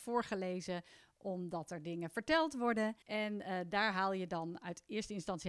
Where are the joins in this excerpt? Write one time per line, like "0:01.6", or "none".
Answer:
0:03.0